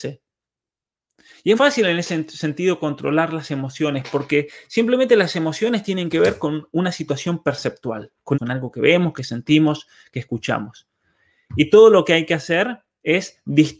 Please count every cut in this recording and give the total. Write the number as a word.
two